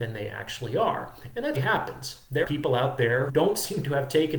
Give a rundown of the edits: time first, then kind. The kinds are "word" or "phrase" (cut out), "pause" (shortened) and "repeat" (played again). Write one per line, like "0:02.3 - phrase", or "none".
0:01.5 - word
0:02.4 - word
0:03.3 - word